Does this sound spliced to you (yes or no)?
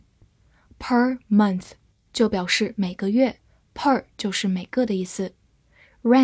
no